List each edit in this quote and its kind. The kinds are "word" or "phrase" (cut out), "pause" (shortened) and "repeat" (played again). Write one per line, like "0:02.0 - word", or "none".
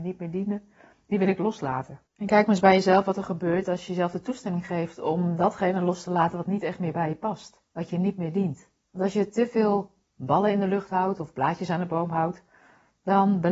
0:02.1 - pause
0:07.7 - pause
0:08.8 - pause